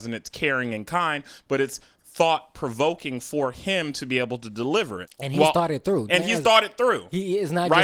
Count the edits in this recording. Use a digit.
2